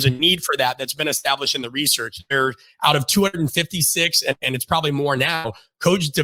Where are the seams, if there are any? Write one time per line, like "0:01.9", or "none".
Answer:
none